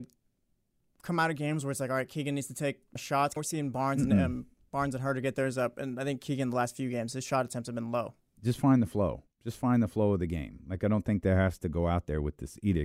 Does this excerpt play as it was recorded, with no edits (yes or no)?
no